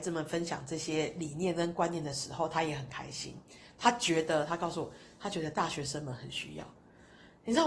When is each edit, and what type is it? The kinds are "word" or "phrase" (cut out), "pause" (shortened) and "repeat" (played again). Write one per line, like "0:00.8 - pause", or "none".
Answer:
none